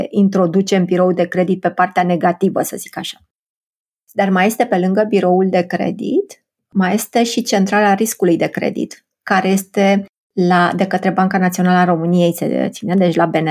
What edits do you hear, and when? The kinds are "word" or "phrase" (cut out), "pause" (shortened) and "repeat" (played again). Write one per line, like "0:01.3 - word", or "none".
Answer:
none

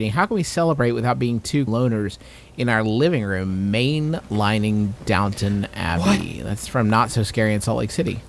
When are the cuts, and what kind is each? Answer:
0:01.7 - word

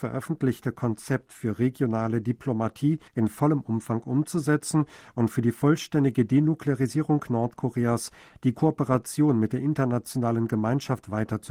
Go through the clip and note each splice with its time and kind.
0:03.1 - pause

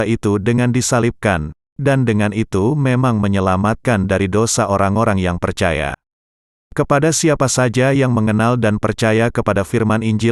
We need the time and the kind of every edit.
none

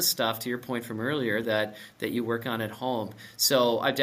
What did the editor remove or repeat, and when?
none

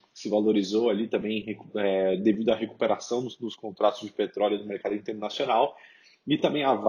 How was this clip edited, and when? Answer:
none

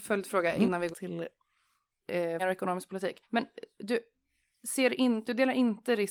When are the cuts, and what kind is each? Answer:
0:00.9 - phrase
0:02.4 - word
0:03.2 - pause

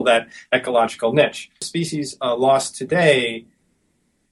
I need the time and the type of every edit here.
0:01.6 - pause

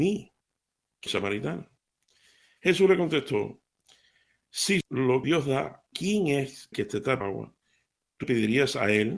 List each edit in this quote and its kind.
0:01.1 - word
0:04.8 - word
0:05.2 - word
0:05.9 - word
0:06.7 - word
0:07.2 - word
0:08.2 - word

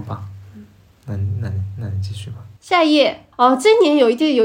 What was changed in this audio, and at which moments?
0:02.6 - pause
0:03.3 - pause

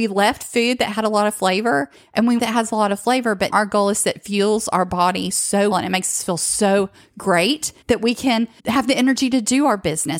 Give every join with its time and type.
0:02.4 - phrase
0:03.5 - word
0:05.7 - word
0:07.8 - pause
0:08.6 - pause

